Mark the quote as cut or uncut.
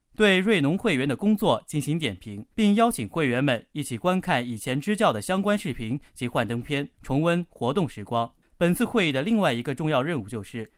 cut